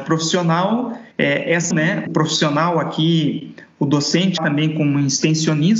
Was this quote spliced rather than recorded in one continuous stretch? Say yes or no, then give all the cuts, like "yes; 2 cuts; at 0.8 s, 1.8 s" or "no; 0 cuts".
yes; 4 cuts; at 1.1 s, 1.7 s, 2.1 s, 4.4 s